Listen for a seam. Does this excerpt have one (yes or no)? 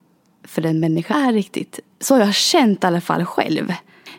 yes